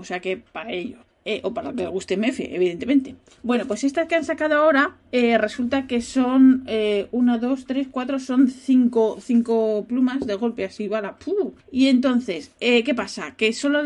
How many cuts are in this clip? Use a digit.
2